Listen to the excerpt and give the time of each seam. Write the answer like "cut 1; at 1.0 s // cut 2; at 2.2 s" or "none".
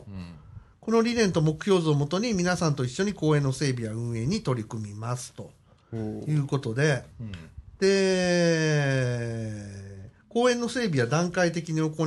cut 1; at 7.1 s // cut 2; at 10.2 s

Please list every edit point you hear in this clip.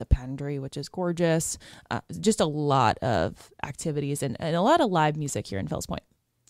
none

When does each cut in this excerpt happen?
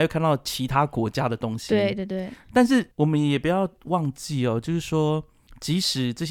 cut 1; at 2.9 s

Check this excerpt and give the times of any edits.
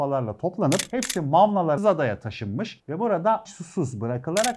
cut 1; at 1.8 s // cut 2; at 3.4 s

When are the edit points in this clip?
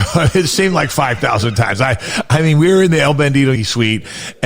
cut 1; at 3.6 s

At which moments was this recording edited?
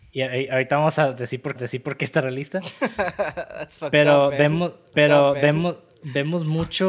cut 1; at 1.6 s // cut 2; at 4.9 s

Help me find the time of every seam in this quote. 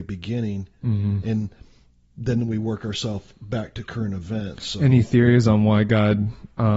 none

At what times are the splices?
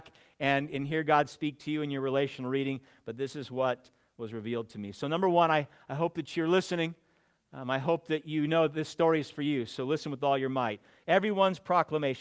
none

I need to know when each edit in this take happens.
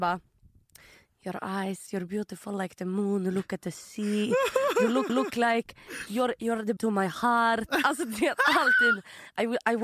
cut 1; at 5.1 s // cut 2; at 6.8 s

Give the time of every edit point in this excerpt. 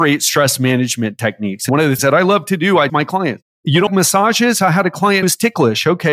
cut 1; at 1.7 s // cut 2; at 2.0 s // cut 3; at 2.9 s // cut 4; at 3.9 s // cut 5; at 5.2 s

